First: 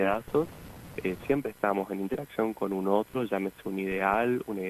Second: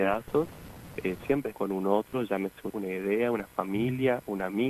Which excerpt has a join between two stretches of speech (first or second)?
second